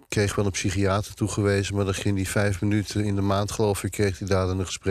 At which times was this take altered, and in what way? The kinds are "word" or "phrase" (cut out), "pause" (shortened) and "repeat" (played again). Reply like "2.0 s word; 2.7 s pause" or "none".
none

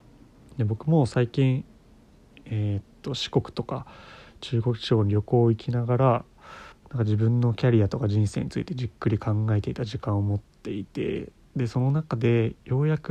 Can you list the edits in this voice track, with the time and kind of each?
6.7 s pause

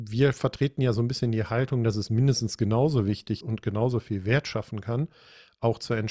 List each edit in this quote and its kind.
3.4 s word

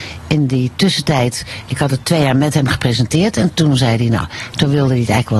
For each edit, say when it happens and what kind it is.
none

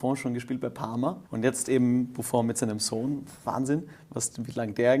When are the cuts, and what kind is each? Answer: 1.3 s pause

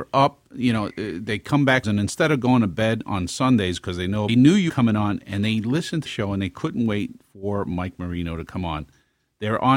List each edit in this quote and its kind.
1.8 s phrase; 4.3 s phrase; 4.7 s word; 6.1 s word

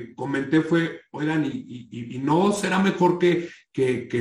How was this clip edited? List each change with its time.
none

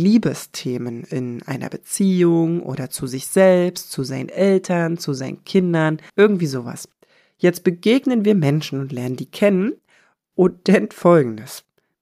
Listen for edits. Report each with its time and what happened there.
6.1 s pause; 10.9 s word

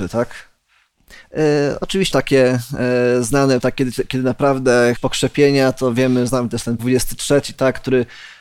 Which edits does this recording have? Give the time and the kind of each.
2.1 s word; 3.6 s word; 5.0 s word; 6.3 s word; 6.8 s word

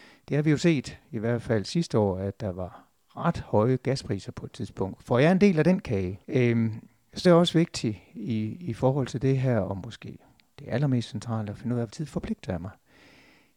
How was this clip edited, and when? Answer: 6.2 s pause; 7.2 s word; 11.9 s word

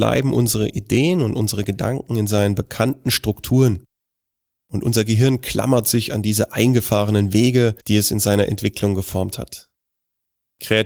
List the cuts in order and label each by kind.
7.8 s pause

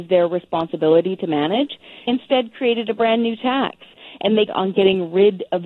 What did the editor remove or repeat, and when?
2.1 s word; 4.5 s word

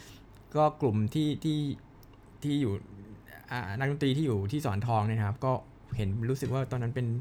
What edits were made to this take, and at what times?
none

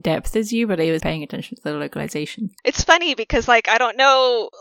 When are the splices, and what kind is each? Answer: 1.0 s word; 2.6 s pause

